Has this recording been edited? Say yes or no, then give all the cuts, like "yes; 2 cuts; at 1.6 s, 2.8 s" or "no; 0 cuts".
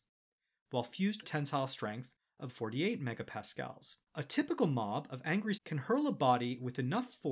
yes; 4 cuts; at 1.2 s, 2.5 s, 4.0 s, 5.6 s